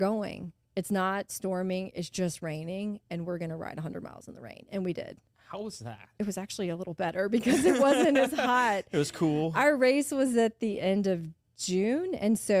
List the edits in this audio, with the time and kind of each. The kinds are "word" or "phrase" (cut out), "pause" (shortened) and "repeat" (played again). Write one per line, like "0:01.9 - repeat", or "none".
0:01.3 - phrase
0:05.2 - pause
0:06.1 - pause